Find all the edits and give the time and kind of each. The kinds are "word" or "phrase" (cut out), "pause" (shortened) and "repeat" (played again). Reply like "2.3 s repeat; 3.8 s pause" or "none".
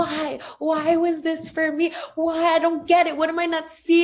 none

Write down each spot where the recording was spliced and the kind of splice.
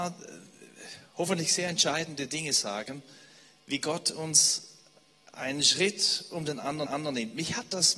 6.9 s repeat

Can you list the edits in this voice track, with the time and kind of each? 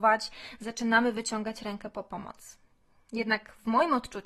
none

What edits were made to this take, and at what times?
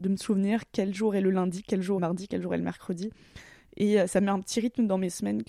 2.0 s phrase

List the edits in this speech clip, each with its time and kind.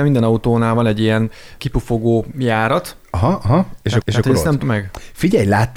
1.6 s word; 4.0 s repeat; 4.6 s phrase

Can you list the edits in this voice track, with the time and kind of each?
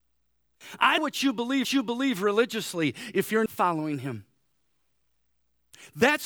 1.0 s phrase; 1.6 s repeat; 3.5 s word

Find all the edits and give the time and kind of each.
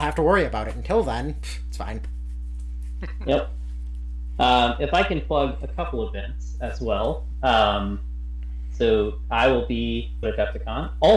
10.2 s word

